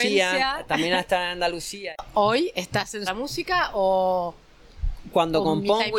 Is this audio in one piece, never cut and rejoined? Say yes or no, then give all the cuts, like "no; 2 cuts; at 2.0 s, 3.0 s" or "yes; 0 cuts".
no; 1 cut; at 3.1 s